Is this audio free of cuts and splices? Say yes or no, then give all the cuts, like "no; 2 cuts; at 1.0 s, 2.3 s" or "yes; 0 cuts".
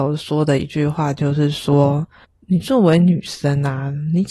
no; 1 cut; at 2.2 s